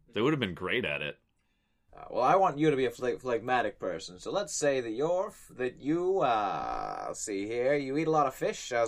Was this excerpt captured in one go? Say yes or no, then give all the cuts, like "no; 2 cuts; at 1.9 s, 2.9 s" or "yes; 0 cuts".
yes; 0 cuts